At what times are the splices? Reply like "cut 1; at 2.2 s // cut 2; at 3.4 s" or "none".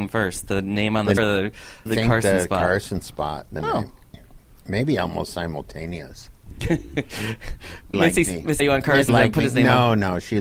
cut 1; at 1.2 s // cut 2; at 1.9 s // cut 3; at 3.6 s // cut 4; at 7.9 s // cut 5; at 8.6 s // cut 6; at 9.1 s